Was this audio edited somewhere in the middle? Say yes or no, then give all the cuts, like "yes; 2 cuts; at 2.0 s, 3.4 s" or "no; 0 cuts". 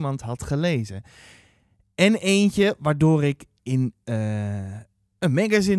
no; 0 cuts